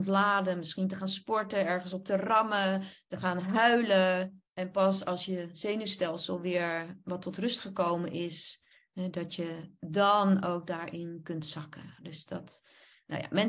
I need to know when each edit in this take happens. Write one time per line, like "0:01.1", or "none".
0:04.5